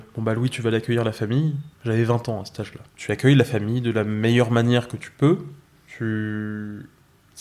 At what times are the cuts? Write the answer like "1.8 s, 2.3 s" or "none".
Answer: 1.7 s, 2.9 s